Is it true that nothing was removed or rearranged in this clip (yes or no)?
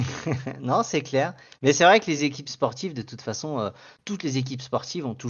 yes